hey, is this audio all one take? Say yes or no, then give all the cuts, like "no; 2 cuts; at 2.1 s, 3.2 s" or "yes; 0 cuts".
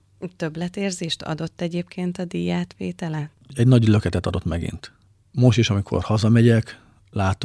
yes; 0 cuts